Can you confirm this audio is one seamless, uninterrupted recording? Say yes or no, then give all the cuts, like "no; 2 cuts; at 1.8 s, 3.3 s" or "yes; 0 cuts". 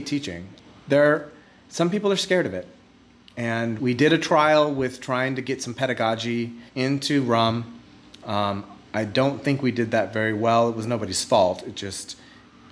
no; 2 cuts; at 3.8 s, 6.7 s